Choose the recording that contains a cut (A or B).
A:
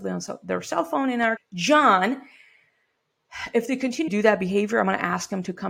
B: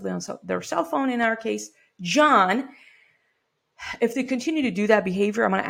A